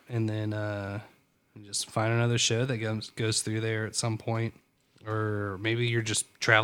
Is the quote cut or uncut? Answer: uncut